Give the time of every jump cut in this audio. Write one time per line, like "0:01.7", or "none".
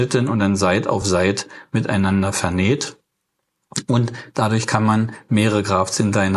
none